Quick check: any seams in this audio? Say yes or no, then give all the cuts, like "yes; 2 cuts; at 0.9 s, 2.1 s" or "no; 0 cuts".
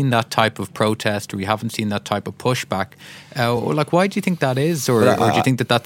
no; 0 cuts